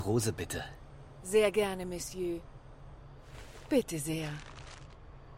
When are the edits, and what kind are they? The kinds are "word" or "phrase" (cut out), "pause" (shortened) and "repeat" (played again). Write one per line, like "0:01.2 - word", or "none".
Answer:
none